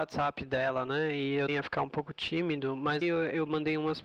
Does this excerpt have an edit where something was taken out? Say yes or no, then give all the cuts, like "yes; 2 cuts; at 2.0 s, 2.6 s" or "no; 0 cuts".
yes; 2 cuts; at 1.5 s, 3.0 s